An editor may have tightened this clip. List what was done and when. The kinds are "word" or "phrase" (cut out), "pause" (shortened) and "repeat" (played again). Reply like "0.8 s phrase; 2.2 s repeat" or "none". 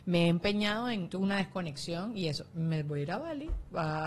1.1 s word